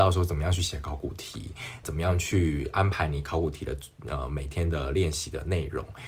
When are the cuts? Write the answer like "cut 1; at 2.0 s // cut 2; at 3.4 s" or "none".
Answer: cut 1; at 1.8 s